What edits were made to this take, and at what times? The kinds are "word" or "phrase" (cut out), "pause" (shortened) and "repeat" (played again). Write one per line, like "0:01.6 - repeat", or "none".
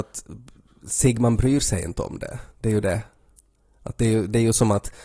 0:02.5 - pause